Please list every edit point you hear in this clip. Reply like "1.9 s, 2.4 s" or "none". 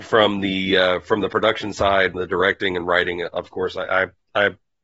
2.1 s